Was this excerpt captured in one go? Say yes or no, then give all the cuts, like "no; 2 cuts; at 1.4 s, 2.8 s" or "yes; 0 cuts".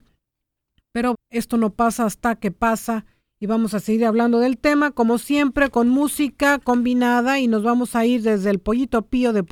no; 1 cut; at 1.1 s